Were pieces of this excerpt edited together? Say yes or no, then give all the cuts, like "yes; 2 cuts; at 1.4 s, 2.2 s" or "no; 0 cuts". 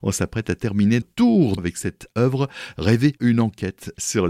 yes; 4 cuts; at 1.0 s, 1.6 s, 2.1 s, 3.2 s